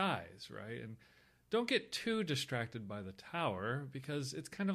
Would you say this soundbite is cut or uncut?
uncut